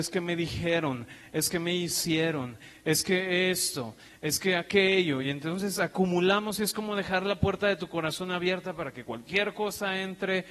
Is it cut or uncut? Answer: uncut